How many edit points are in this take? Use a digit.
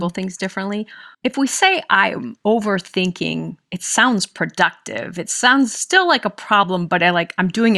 1